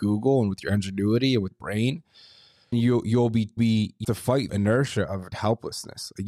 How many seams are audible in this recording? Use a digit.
6